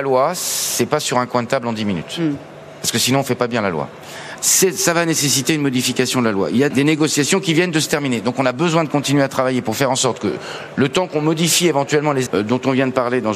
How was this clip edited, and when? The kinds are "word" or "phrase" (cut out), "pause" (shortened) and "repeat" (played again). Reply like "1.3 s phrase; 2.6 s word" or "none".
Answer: 6.7 s word; 12.3 s word